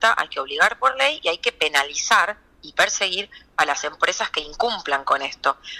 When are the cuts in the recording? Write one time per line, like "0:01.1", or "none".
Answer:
none